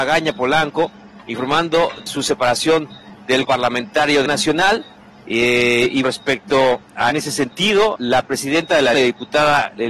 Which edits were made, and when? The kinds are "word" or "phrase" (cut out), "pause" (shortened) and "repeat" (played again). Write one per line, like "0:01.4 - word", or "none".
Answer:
0:02.1 - word
0:03.4 - word
0:04.3 - word
0:06.0 - word
0:07.1 - word
0:08.0 - word
0:08.9 - word